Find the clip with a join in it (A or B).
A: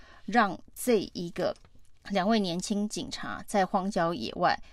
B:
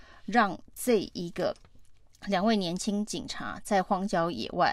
A